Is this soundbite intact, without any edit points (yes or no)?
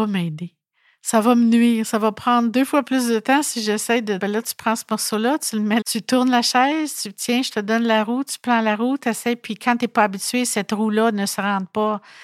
no